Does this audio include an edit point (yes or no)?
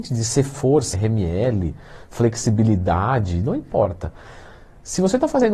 yes